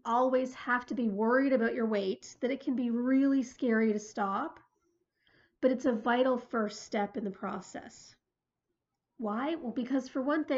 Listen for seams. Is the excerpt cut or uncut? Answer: uncut